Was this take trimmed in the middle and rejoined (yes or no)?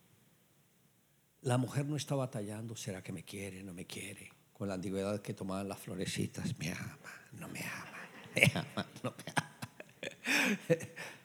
yes